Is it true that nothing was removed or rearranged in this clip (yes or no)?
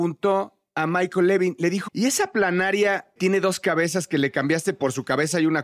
no